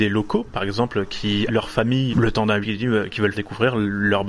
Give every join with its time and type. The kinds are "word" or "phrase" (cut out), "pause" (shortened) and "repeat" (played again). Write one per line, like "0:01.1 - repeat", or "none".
0:01.5 - word
0:02.1 - word
0:02.6 - word
0:03.3 - word